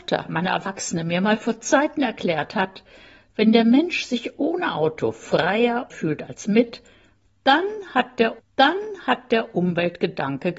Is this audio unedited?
no; 2 cuts; at 5.9 s, 8.4 s

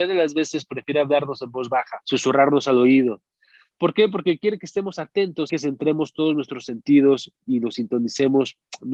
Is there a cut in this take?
yes; 2 cuts; at 2.0 s, 5.5 s

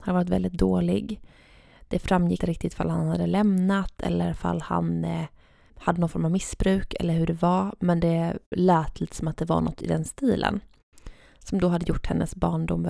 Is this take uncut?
no; 2 cuts; at 2.4 s, 5.7 s

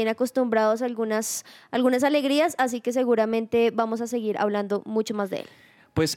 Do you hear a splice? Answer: no; 0 cuts

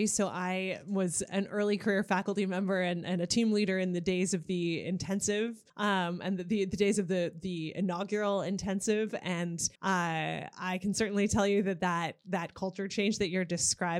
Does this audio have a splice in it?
yes; 2 cuts; at 5.7 s, 9.8 s

